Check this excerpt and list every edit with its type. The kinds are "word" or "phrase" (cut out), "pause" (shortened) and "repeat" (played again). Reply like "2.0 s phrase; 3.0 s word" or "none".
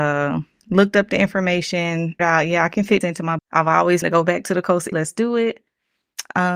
2.2 s word; 3.0 s word; 3.4 s word; 4.0 s word; 4.9 s word